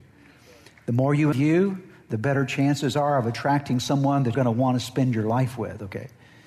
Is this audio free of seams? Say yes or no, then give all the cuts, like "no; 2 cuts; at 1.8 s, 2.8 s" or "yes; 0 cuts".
no; 2 cuts; at 1.3 s, 4.3 s